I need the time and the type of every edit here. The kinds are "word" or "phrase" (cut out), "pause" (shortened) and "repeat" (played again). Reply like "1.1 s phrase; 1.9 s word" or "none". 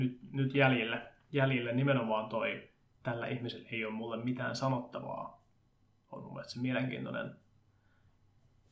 none